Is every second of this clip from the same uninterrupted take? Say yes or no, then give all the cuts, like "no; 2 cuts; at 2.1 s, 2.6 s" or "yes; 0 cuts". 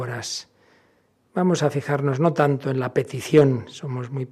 yes; 0 cuts